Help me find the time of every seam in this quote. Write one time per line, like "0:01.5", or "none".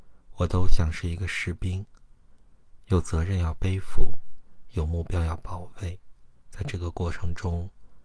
0:06.4